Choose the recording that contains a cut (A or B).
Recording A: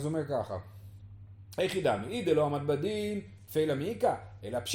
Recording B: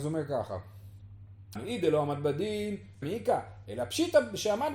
B